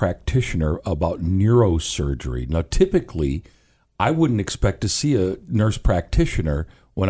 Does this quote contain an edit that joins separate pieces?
no; 0 cuts

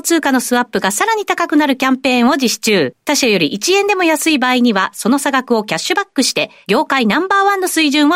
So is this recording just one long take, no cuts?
no; 1 cut; at 3.0 s

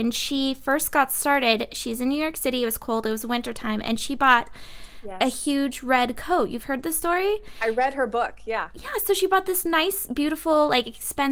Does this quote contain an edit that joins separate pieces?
no; 0 cuts

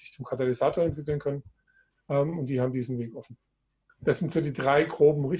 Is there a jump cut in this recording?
no; 0 cuts

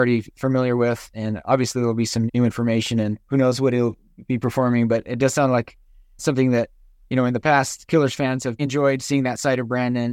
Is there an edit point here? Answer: yes; 3 cuts; at 2.3 s, 6.2 s, 8.6 s

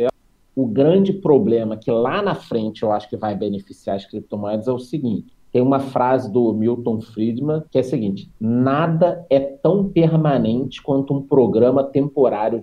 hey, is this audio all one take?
no; 1 cut; at 7.7 s

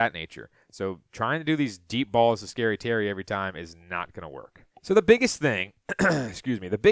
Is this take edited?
yes; 1 cut; at 4.7 s

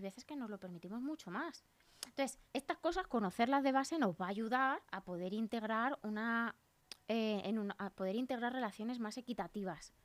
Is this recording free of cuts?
no; 2 cuts; at 2.4 s, 4.8 s

